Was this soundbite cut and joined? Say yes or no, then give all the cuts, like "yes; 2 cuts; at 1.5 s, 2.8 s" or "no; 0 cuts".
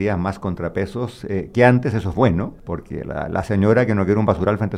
no; 0 cuts